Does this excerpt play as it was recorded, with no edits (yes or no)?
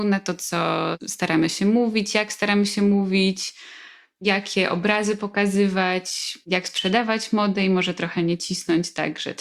yes